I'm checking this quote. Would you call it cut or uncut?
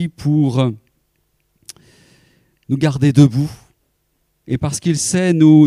uncut